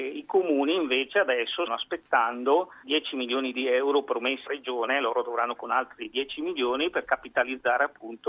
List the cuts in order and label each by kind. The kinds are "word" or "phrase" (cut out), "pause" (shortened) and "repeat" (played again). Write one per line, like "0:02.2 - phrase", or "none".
0:01.7 - word
0:02.8 - word
0:04.5 - word
0:05.6 - word